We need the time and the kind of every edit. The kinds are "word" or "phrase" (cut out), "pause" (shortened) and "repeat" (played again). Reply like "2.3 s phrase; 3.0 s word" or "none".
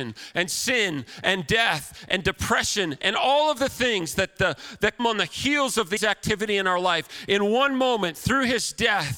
5.0 s word; 6.0 s word